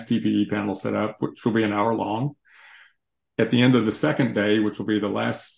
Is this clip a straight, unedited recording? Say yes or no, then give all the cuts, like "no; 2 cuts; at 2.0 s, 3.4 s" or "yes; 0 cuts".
yes; 0 cuts